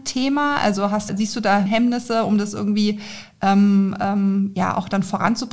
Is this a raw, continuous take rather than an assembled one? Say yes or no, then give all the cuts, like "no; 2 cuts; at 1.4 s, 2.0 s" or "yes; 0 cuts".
no; 2 cuts; at 1.1 s, 1.7 s